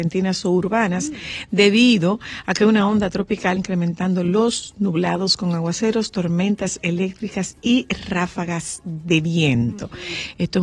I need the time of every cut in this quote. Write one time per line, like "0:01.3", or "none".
0:03.6